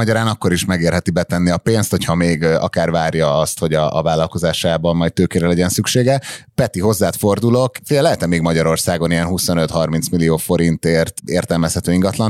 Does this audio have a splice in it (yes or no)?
no